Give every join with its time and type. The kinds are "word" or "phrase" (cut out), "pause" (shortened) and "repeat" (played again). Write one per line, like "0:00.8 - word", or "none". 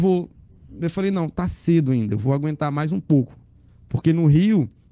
none